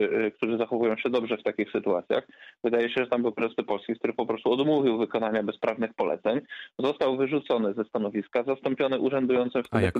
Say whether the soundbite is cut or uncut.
cut